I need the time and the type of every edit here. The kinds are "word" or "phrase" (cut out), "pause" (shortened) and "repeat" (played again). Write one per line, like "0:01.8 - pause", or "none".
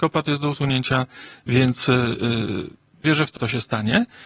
0:03.0 - word
0:03.4 - word